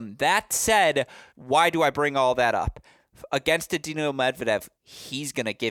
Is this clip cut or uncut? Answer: cut